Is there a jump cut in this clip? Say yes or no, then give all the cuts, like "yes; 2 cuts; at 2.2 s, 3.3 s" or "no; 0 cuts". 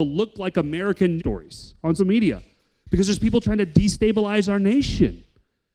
yes; 2 cuts; at 1.2 s, 2.0 s